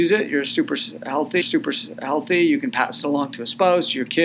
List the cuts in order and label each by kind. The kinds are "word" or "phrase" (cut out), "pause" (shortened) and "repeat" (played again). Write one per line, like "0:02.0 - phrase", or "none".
0:01.4 - repeat